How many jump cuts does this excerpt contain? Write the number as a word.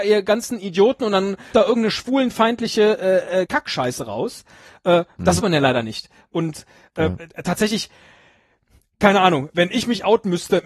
three